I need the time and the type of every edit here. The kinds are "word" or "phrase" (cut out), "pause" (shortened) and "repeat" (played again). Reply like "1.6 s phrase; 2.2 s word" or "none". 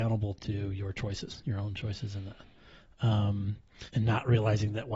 3.9 s pause